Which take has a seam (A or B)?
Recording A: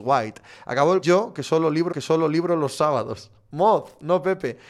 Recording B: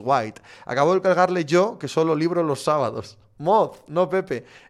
A